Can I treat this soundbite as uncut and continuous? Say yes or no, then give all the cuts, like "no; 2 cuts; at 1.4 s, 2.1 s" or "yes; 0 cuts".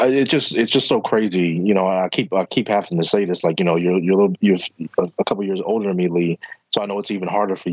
yes; 0 cuts